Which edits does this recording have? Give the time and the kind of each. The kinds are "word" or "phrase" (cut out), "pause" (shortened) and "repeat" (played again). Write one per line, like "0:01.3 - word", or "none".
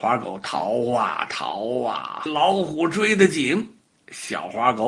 0:02.3 - word